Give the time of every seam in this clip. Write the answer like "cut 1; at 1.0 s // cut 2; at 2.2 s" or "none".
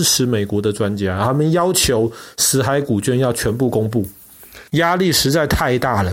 cut 1; at 4.7 s